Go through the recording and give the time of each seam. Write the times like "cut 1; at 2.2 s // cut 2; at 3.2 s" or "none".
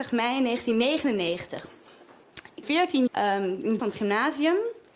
cut 1; at 2.6 s // cut 2; at 3.1 s // cut 3; at 3.8 s

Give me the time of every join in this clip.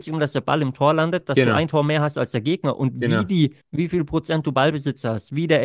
cut 1; at 3.6 s

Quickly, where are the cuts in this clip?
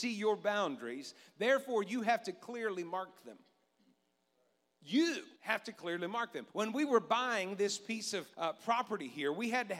cut 1; at 5.4 s // cut 2; at 6.5 s // cut 3; at 8.3 s

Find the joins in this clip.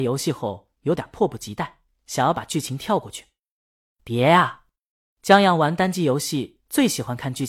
none

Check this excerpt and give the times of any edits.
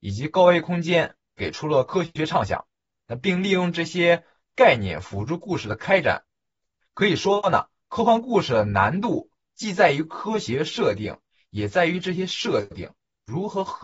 none

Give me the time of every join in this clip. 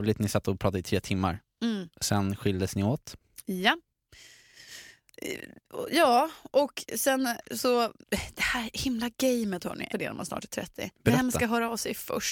cut 1; at 1.9 s // cut 2; at 8.0 s // cut 3; at 9.9 s // cut 4; at 10.9 s

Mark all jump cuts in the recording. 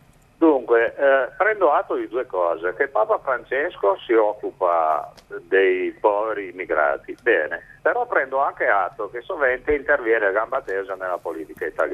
cut 1; at 7.8 s

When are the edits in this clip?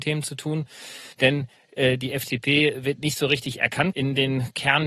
cut 1; at 1.1 s // cut 2; at 3.9 s

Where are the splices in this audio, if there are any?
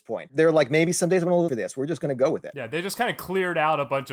cut 1; at 1.5 s

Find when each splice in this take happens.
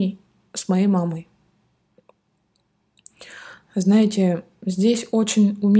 none

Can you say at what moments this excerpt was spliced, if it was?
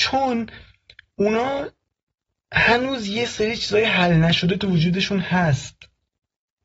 none

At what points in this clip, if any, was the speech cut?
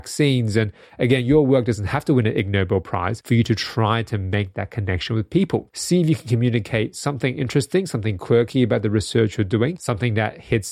none

